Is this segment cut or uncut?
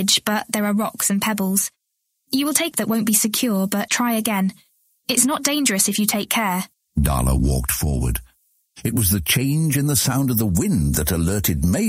cut